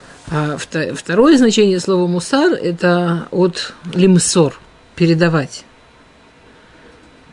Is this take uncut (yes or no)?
yes